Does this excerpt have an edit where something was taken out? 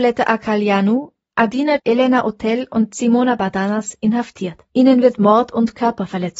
yes; 2 cuts; at 1.8 s, 4.7 s

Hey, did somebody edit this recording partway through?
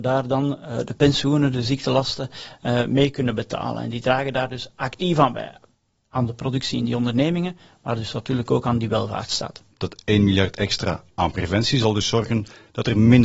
no; 0 cuts

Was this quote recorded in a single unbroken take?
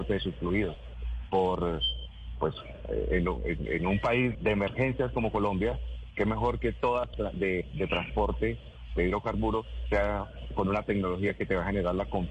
no; 2 cuts; at 4.3 s, 7.1 s

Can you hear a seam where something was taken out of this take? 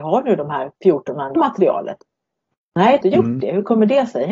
yes; 2 cuts; at 1.4 s, 3.0 s

